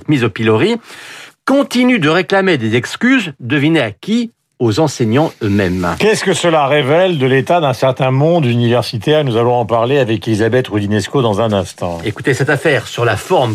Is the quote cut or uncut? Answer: uncut